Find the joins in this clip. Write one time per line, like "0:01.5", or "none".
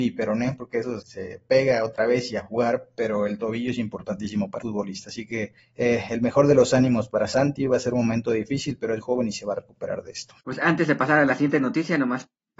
0:01.0
0:04.6
0:05.6
0:09.0
0:10.4